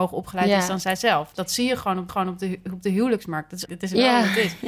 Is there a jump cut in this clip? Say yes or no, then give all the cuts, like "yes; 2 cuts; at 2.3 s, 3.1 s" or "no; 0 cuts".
yes; 2 cuts; at 2.1 s, 3.6 s